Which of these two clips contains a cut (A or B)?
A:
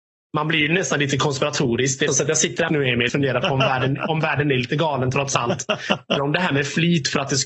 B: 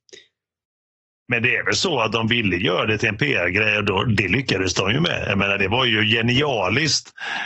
A